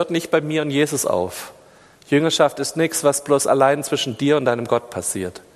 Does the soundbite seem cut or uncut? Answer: uncut